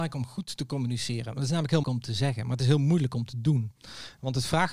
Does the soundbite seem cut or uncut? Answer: cut